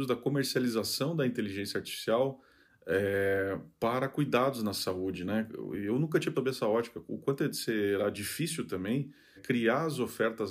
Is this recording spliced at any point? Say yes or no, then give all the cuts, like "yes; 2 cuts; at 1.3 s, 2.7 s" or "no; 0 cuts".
yes; 2 cuts; at 6.3 s, 9.4 s